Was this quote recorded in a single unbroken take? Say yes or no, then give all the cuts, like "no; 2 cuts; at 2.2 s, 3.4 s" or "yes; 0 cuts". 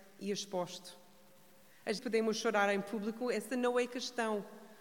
no; 1 cut; at 2.0 s